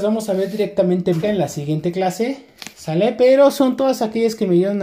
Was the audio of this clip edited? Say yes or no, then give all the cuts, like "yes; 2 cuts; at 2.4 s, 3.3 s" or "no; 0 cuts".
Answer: yes; 1 cut; at 1.2 s